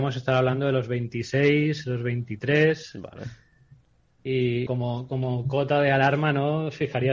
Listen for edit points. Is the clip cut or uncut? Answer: cut